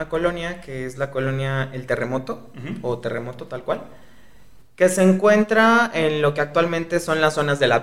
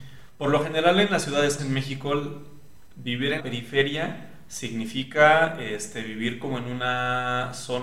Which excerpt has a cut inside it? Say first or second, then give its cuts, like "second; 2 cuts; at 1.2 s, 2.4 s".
second; 2 cuts; at 1.6 s, 3.4 s